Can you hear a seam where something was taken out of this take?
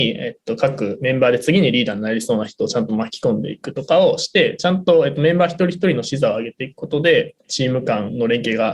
yes; 1 cut; at 7.4 s

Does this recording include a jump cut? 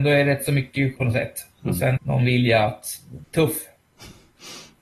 yes; 3 cuts; at 1.0 s, 2.0 s, 3.2 s

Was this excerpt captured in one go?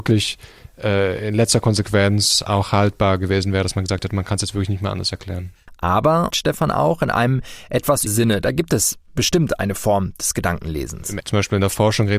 no; 3 cuts; at 6.3 s, 8.1 s, 11.2 s

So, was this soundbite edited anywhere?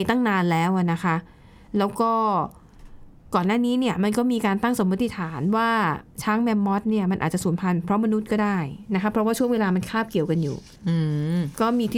yes; 1 cut; at 10.8 s

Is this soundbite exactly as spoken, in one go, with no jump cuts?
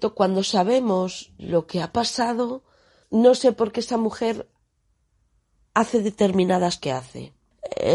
no; 2 cuts; at 1.4 s, 6.8 s

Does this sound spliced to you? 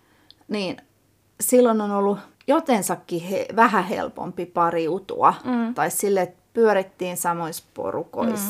yes; 1 cut; at 2.3 s

